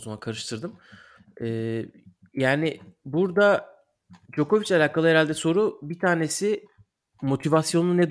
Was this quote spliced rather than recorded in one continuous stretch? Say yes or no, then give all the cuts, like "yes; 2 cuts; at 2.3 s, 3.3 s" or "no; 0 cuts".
yes; 2 cuts; at 1.2 s, 4.2 s